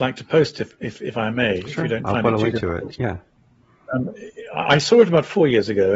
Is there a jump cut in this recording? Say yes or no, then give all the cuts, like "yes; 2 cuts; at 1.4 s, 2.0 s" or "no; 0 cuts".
no; 0 cuts